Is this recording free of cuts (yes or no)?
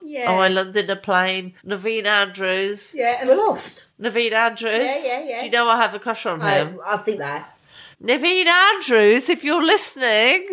no